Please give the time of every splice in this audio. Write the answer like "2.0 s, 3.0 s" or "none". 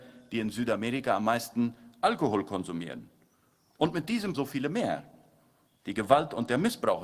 4.3 s